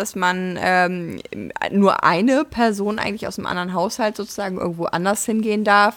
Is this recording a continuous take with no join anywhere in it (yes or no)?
yes